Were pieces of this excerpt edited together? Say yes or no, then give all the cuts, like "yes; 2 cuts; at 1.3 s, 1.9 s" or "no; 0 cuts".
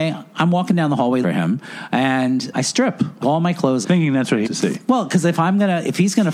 yes; 5 cuts; at 1.2 s, 2.5 s, 3.2 s, 3.8 s, 4.4 s